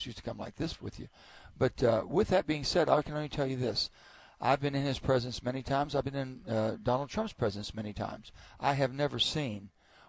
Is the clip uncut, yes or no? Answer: yes